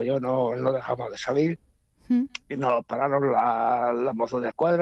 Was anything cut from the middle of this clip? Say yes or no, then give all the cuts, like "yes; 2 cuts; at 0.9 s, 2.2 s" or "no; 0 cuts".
no; 0 cuts